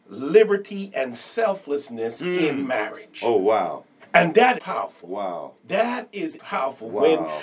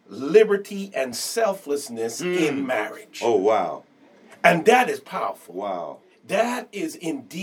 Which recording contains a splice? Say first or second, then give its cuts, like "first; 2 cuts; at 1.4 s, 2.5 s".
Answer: first; 4 cuts; at 4.0 s, 4.6 s, 5.6 s, 6.4 s